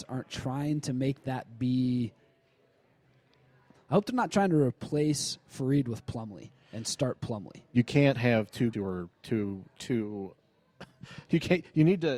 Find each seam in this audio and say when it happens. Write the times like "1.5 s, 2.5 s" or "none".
8.7 s